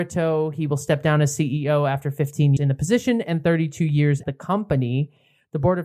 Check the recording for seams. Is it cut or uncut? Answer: cut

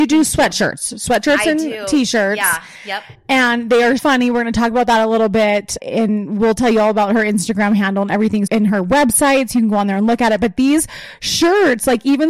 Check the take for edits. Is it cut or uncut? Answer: cut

